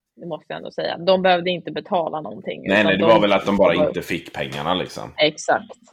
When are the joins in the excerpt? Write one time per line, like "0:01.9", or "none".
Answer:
none